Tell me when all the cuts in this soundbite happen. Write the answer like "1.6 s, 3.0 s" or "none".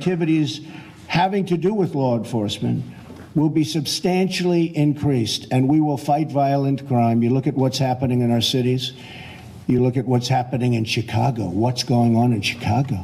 none